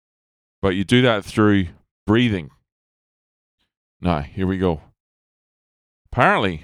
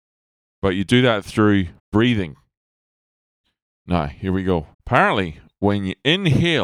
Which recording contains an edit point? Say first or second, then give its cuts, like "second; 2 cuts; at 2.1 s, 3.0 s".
second; 2 cuts; at 1.8 s, 4.7 s